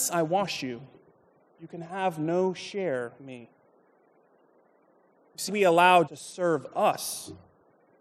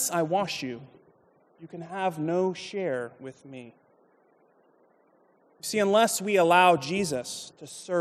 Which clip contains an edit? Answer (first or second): first